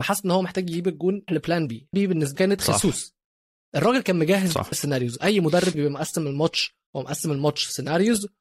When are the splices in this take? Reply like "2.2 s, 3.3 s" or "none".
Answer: 1.3 s, 1.9 s, 2.4 s, 4.7 s, 5.7 s, 6.9 s